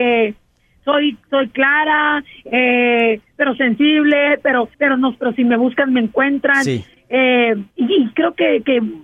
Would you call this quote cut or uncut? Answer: cut